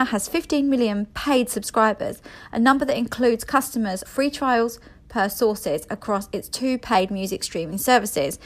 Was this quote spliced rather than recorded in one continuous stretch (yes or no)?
yes